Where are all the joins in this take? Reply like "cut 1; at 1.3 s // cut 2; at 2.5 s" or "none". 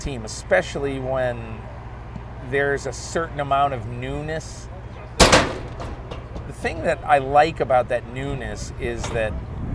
none